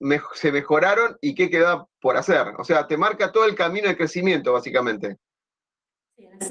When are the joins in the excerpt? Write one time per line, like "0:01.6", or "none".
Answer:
none